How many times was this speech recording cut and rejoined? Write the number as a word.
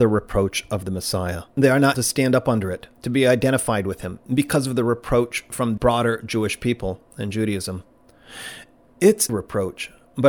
four